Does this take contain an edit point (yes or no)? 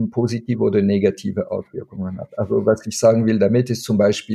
no